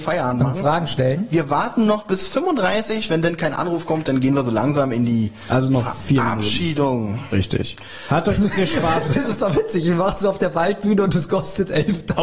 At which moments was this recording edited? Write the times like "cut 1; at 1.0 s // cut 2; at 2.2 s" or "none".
none